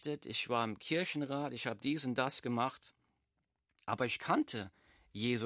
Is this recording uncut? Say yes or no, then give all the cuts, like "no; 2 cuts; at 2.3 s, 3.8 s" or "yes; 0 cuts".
yes; 0 cuts